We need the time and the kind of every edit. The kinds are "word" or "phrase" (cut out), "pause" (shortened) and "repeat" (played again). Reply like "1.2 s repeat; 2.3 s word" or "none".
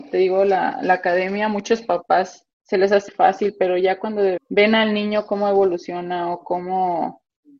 2.5 s pause; 3.1 s word; 4.4 s word